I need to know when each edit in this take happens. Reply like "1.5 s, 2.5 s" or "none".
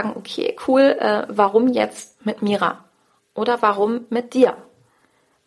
none